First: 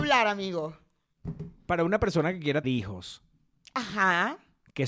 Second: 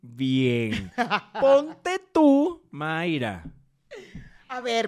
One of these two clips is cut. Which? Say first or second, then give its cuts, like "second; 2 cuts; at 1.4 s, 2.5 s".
first; 1 cut; at 2.6 s